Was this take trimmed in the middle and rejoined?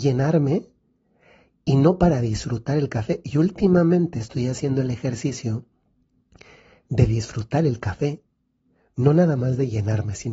no; 0 cuts

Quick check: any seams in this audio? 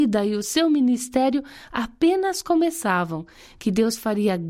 no; 0 cuts

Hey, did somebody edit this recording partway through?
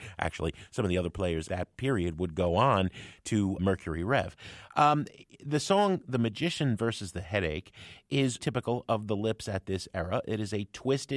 yes; 3 cuts; at 1.5 s, 3.6 s, 8.4 s

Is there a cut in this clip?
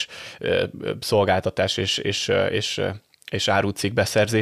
no; 0 cuts

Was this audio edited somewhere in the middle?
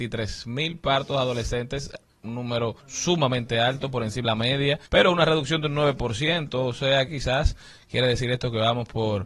yes; 4 cuts; at 2.8 s, 4.2 s, 4.9 s, 7.1 s

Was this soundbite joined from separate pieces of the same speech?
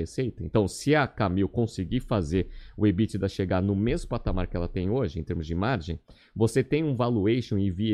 no; 0 cuts

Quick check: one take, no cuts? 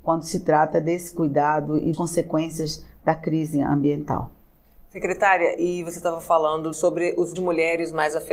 no; 3 cuts; at 1.9 s, 6.7 s, 7.4 s

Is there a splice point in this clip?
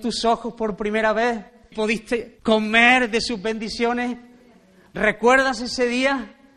yes; 1 cut; at 1.7 s

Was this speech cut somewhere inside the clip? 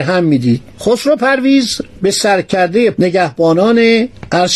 no; 0 cuts

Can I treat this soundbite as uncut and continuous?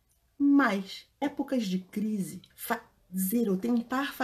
no; 2 cuts; at 1.2 s, 2.5 s

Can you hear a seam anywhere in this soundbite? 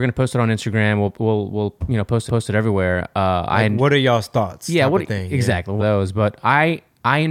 yes; 2 cuts; at 2.3 s, 5.8 s

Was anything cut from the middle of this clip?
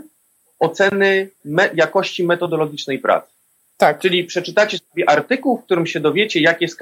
no; 0 cuts

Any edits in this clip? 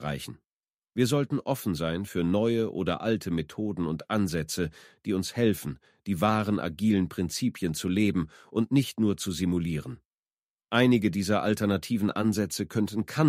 no; 0 cuts

